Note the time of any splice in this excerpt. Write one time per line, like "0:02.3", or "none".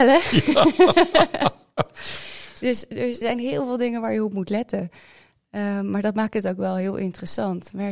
0:03.2